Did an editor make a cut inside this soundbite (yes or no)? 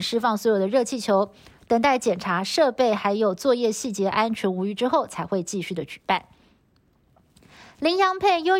no